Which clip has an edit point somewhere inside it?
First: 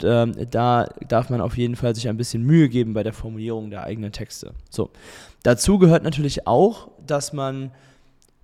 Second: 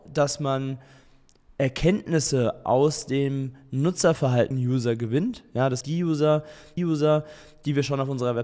second; 3 cuts; at 4.5 s, 5.8 s, 6.8 s

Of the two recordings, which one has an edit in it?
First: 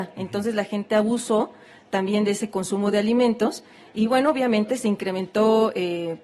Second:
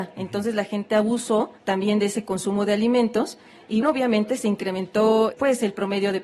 second; 3 cuts; at 1.6 s, 3.8 s, 5.3 s

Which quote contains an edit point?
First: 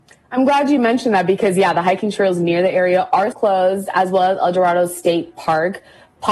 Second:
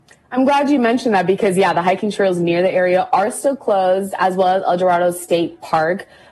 first; 1 cut; at 3.3 s

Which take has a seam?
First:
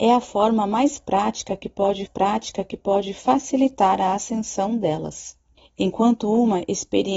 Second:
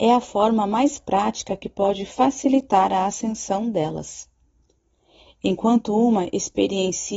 first; 2 cuts; at 2.1 s, 5.6 s

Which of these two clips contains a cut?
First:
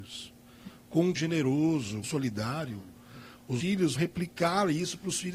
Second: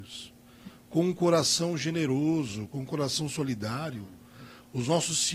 first; 4 cuts; at 1.2 s, 2.0 s, 3.6 s, 4.0 s

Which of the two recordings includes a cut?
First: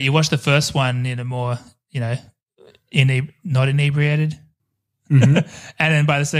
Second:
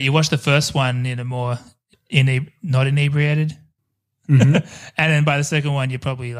second; 1 cut; at 1.9 s

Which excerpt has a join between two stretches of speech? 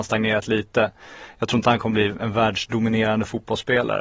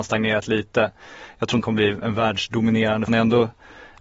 second; 2 cuts; at 1.6 s, 3.1 s

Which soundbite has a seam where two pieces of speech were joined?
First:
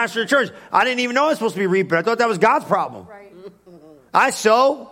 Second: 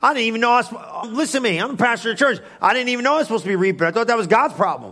second; 1 cut; at 1.0 s

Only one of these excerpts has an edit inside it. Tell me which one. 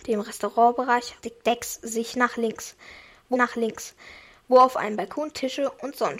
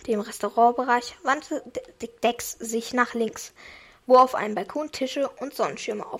first; 2 cuts; at 1.2 s, 3.3 s

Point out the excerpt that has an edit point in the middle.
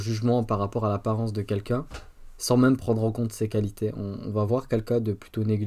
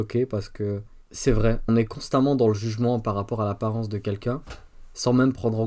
second; 1 cut; at 1.7 s

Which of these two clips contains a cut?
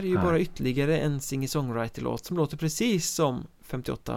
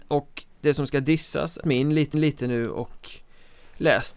second; 2 cuts; at 1.6 s, 2.1 s

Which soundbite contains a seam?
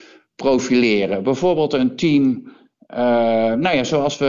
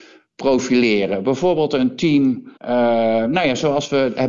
second; 1 cut; at 2.6 s

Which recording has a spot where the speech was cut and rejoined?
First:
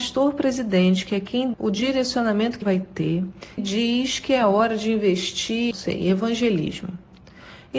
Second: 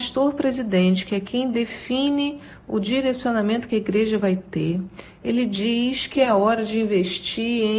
first; 4 cuts; at 1.5 s, 2.6 s, 3.6 s, 5.7 s

